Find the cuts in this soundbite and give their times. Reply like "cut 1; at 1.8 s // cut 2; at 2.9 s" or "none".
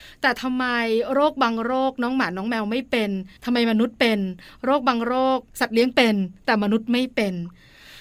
cut 1; at 3.4 s // cut 2; at 5.5 s